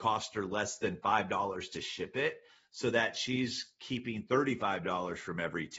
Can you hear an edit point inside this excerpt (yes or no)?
no